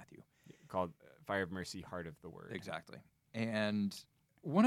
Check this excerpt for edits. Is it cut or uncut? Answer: uncut